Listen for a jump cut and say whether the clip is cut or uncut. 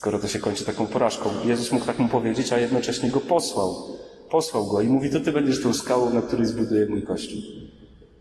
uncut